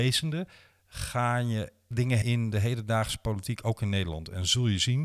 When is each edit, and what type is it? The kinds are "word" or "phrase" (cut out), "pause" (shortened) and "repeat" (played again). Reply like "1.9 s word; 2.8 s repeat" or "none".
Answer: 1.9 s word; 2.2 s word